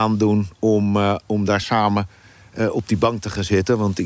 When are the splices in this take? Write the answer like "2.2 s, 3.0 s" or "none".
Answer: none